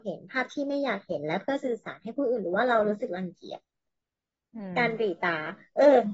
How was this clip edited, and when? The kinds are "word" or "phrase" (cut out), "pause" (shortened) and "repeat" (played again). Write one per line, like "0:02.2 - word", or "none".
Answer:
none